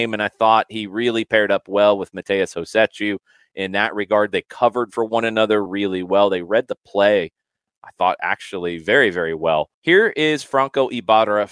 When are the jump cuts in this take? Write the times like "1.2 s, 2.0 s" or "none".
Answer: 9.7 s